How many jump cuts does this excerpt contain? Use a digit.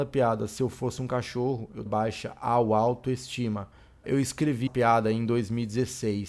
3